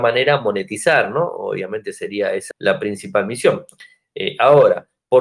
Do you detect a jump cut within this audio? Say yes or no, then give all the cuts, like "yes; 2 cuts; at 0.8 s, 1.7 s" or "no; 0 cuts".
yes; 1 cut; at 2.5 s